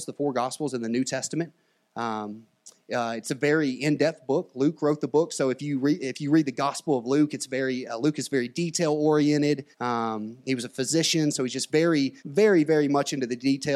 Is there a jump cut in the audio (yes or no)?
yes